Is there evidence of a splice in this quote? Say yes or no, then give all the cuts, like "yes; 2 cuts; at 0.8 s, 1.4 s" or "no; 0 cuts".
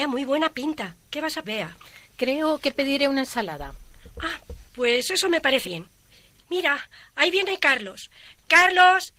yes; 5 cuts; at 1.0 s, 1.4 s, 2.0 s, 4.7 s, 5.6 s